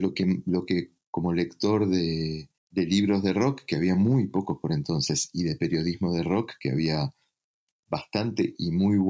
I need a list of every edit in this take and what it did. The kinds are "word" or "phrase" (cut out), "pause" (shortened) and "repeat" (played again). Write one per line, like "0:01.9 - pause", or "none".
0:02.6 - pause

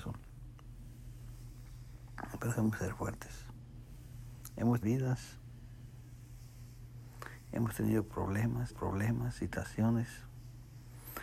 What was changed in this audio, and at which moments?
0:04.8 - phrase
0:08.7 - repeat

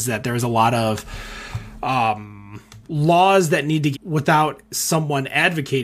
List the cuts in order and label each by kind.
0:03.9 - phrase

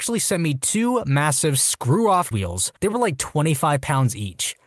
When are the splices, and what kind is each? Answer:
0:02.3 - word
0:02.8 - pause

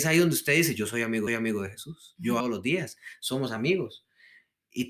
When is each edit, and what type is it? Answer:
0:01.3 - repeat
0:02.4 - phrase

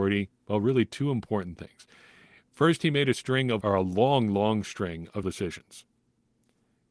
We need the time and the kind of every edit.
0:03.6 - word
0:05.2 - word

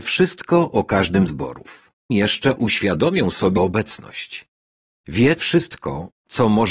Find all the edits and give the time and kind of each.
0:01.3 - word
0:02.1 - word
0:02.6 - word
0:03.6 - word
0:05.4 - word

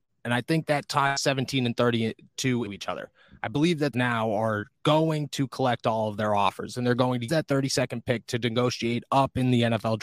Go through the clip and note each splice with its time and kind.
0:02.7 - word
0:03.9 - phrase
0:07.3 - word

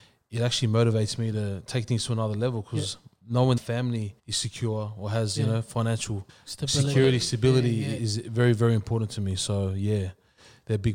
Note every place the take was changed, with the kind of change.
0:03.6 - phrase
0:04.2 - pause
0:06.3 - pause
0:08.0 - word

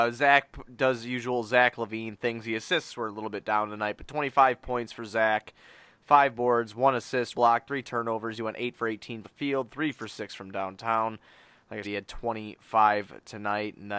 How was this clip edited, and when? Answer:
0:07.3 - word
0:09.2 - word
0:11.8 - word

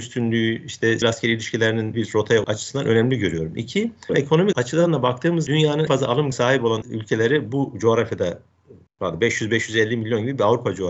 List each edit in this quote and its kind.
0:01.0 - word
0:01.9 - word
0:02.4 - word
0:04.1 - word
0:04.5 - word
0:05.5 - word
0:05.9 - word
0:06.3 - word
0:06.8 - word

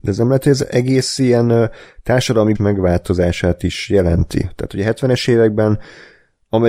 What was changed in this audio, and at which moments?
0:02.6 - word

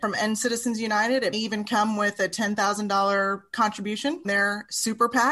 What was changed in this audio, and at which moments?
0:01.3 - word
0:04.2 - word

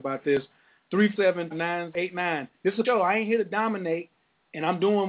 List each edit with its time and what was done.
0:01.2 - word
0:01.5 - phrase
0:01.9 - word
0:02.5 - pause
0:02.8 - word

